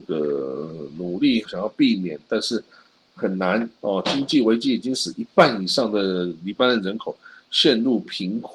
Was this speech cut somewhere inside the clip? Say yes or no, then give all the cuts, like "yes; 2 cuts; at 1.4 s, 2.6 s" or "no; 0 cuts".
yes; 1 cut; at 1.5 s